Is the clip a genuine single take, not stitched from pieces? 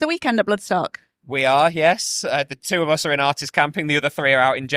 yes; 0 cuts

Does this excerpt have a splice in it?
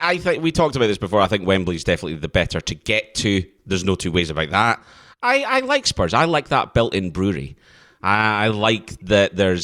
no; 0 cuts

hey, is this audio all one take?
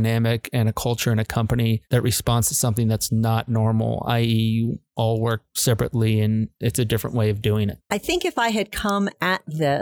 no; 1 cut; at 1.9 s

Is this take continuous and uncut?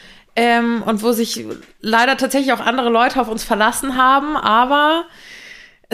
yes; 0 cuts

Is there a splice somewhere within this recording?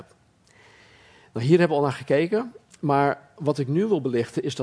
no; 0 cuts

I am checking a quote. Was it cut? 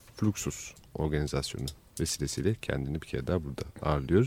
no; 0 cuts

